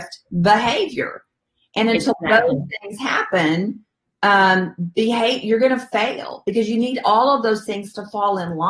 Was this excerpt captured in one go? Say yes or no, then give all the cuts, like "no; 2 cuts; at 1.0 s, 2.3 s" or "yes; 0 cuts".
yes; 0 cuts